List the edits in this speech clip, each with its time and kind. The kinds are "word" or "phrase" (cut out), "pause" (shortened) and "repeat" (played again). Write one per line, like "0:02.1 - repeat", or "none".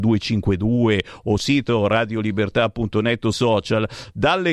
0:01.4 - word
0:03.3 - word